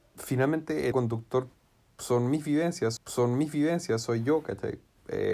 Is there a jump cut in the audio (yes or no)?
yes